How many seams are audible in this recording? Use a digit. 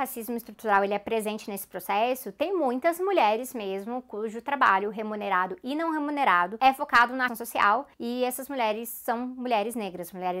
2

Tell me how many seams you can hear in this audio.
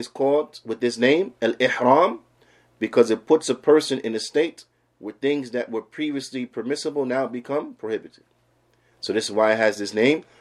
0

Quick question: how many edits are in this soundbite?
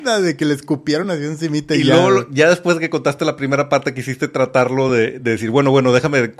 0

